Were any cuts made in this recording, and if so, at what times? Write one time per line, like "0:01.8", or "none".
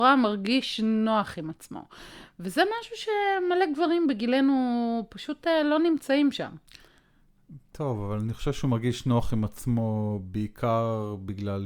none